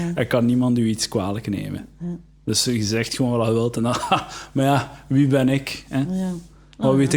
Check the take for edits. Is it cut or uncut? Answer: uncut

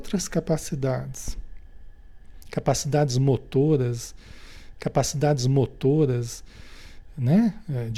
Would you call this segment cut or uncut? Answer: cut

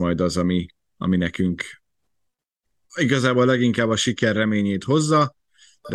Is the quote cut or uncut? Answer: uncut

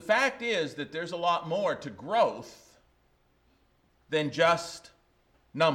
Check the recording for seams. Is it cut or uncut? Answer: uncut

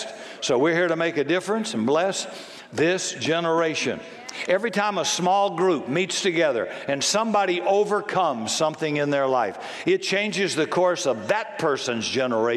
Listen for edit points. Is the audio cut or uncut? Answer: uncut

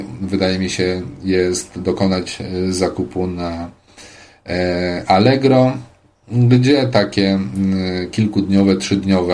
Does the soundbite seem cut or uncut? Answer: uncut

